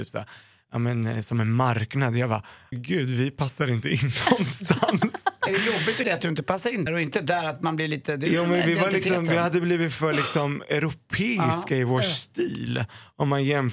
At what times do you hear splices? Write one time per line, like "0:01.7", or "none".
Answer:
0:02.7
0:06.0
0:06.9